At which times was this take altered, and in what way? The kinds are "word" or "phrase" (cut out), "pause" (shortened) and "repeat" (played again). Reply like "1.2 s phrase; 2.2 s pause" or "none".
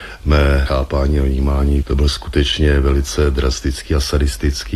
1.8 s word